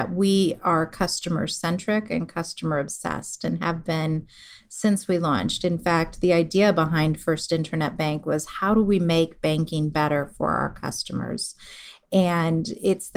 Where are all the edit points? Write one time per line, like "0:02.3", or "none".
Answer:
none